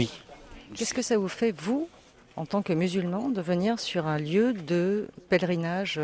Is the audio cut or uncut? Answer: uncut